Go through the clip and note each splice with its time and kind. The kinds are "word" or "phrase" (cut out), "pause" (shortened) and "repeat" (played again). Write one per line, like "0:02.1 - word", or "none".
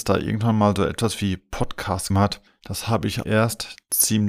0:02.1 - word
0:02.5 - pause
0:03.2 - word